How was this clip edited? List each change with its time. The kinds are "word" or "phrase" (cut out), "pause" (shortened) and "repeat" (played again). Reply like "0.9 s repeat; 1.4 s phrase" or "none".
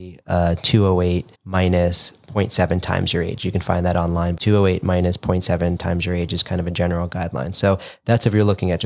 1.3 s pause; 4.4 s word

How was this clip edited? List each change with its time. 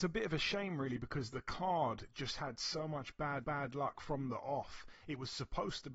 3.4 s repeat

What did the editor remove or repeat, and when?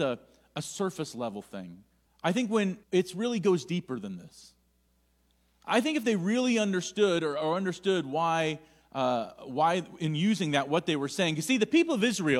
2.1 s pause; 2.8 s pause

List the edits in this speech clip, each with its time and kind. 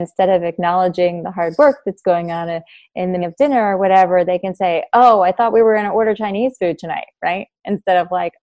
3.2 s word

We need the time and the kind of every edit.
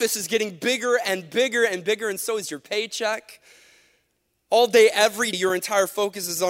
5.3 s word

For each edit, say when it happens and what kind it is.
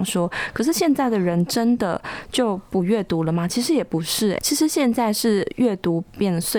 4.4 s word

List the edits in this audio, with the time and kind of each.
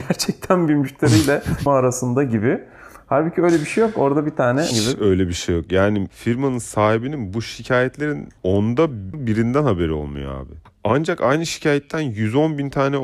1.7 s phrase; 4.7 s word; 8.4 s pause

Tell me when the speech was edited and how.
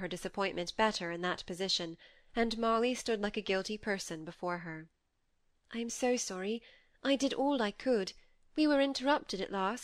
none

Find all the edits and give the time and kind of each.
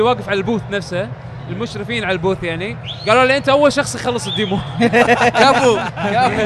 none

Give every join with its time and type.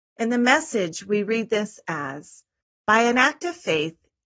none

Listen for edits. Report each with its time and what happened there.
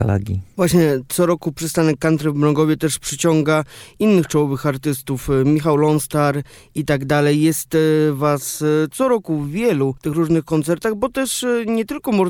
none

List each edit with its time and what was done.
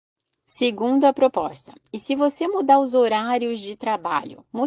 none

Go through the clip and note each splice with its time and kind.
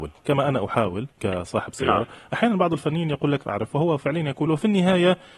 1.1 s pause; 3.4 s phrase; 4.5 s word

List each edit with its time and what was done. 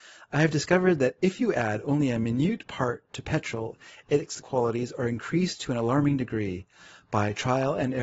4.4 s word

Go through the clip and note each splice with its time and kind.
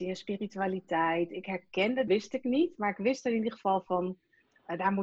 2.1 s phrase

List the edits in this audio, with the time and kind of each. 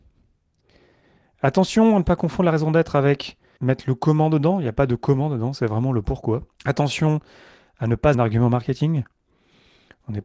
3.6 s word; 6.5 s pause; 8.1 s phrase

